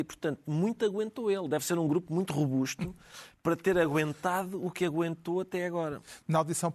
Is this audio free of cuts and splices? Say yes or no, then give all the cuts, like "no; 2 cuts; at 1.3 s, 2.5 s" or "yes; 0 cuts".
yes; 0 cuts